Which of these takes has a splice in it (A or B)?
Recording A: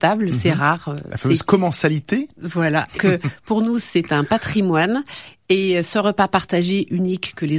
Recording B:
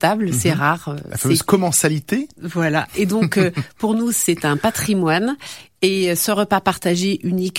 A